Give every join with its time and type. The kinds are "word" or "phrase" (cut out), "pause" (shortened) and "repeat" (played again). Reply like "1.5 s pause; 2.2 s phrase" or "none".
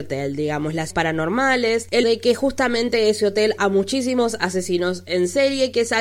0.9 s word; 2.0 s word; 3.6 s word

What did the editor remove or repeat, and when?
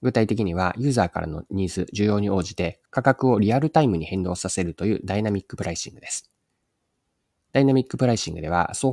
2.9 s pause

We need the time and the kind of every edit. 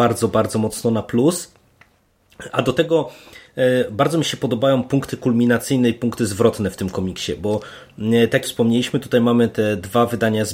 8.4 s word

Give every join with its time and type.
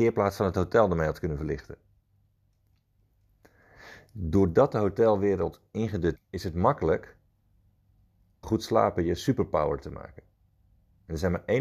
6.2 s word; 8.4 s phrase

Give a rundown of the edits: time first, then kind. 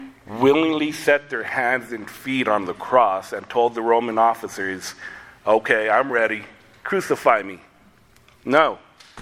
none

